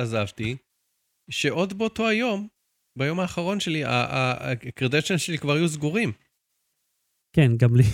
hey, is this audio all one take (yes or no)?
yes